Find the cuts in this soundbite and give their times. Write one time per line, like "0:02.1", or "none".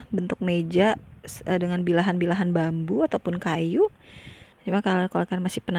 0:04.5